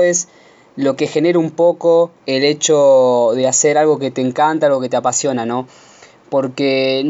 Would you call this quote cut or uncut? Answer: cut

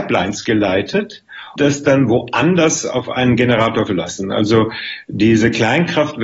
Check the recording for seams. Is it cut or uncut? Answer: cut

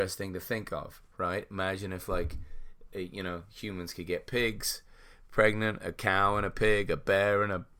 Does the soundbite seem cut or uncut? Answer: uncut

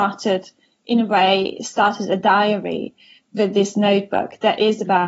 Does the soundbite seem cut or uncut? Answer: uncut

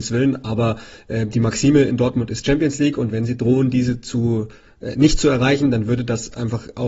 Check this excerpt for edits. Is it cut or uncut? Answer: uncut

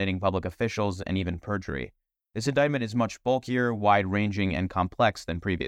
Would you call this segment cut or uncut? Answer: uncut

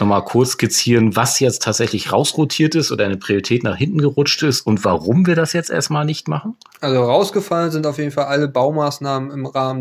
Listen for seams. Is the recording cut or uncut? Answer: uncut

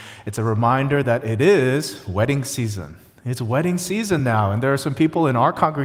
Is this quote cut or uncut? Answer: uncut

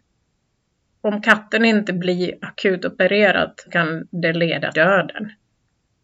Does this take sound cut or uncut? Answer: cut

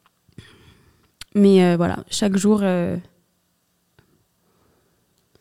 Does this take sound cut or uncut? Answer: cut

